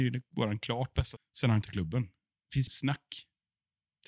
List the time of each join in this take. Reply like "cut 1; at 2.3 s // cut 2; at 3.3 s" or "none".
cut 1; at 1.2 s // cut 2; at 1.6 s // cut 3; at 2.7 s